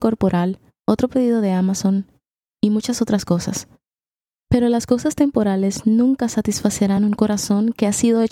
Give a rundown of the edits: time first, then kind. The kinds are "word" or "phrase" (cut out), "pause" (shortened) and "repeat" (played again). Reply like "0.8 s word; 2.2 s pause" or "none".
none